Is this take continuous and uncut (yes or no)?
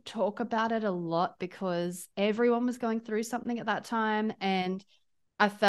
yes